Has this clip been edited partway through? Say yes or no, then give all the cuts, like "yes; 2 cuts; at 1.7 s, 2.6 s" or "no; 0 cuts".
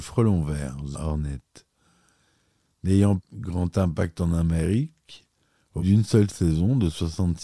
yes; 3 cuts; at 0.9 s, 3.2 s, 5.8 s